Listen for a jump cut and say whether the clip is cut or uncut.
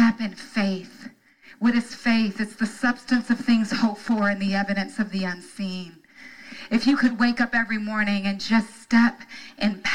uncut